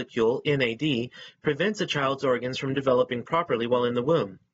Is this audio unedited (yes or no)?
yes